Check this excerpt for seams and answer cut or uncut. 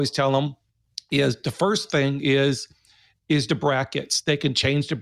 uncut